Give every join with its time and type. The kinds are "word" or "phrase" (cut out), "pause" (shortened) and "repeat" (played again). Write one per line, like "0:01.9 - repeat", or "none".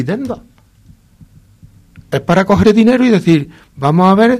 0:02.6 - word